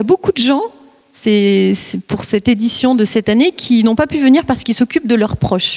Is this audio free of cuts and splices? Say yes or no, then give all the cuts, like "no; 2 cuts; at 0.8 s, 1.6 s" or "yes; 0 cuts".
yes; 0 cuts